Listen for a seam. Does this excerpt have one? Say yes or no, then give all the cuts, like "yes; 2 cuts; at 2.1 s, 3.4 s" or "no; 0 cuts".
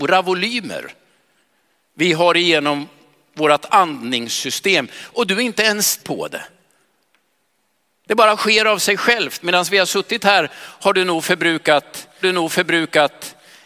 yes; 2 cuts; at 6.0 s, 12.2 s